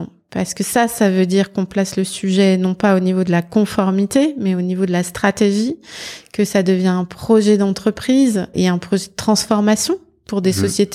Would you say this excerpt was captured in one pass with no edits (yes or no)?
no